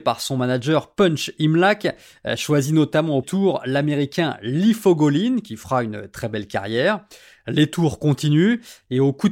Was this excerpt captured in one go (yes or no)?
no